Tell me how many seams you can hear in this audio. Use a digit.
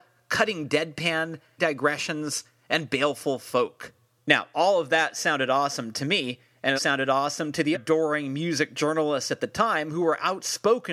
3